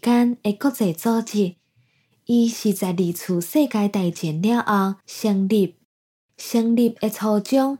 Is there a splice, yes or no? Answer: no